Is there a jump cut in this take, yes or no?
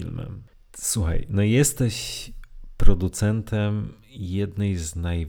no